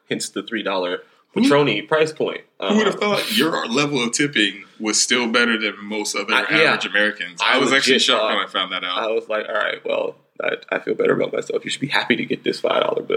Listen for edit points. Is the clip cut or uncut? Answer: uncut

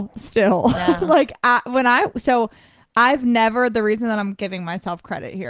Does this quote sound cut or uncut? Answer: uncut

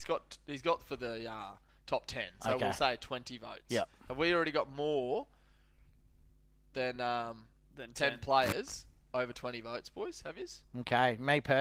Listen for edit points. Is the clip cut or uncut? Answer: uncut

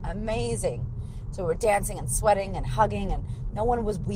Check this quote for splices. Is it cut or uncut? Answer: uncut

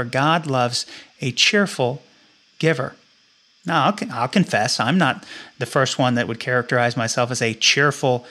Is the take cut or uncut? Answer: uncut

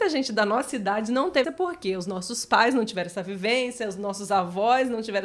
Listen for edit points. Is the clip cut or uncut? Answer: cut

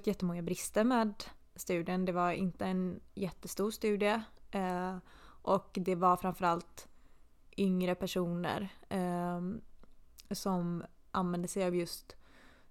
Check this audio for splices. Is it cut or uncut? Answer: uncut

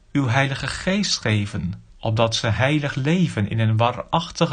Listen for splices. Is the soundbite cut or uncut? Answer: cut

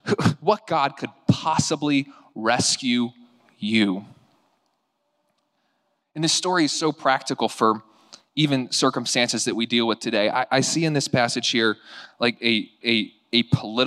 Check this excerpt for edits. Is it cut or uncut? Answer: cut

